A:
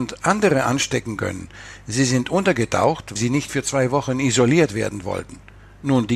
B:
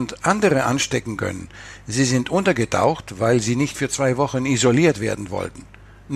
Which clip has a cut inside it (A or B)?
A